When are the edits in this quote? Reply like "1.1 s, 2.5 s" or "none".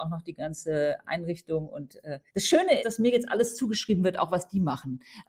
2.3 s, 2.8 s